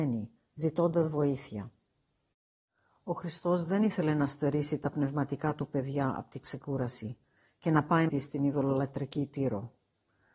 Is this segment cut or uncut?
cut